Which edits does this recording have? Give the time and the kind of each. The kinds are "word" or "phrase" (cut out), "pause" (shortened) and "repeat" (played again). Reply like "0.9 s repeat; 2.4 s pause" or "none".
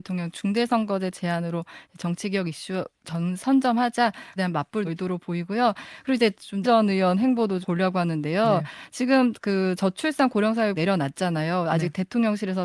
4.4 s word; 4.8 s word; 6.6 s word; 7.6 s word; 10.8 s word